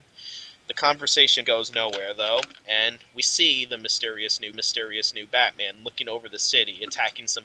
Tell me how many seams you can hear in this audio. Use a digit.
4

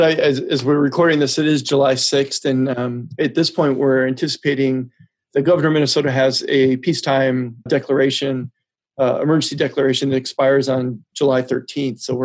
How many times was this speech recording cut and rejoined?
1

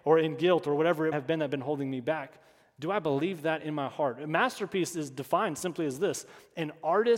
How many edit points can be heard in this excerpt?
1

